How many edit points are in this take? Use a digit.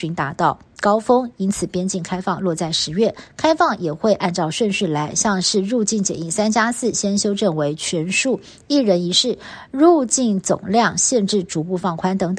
0